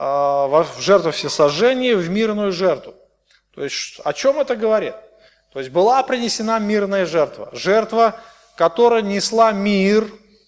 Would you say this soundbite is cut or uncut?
uncut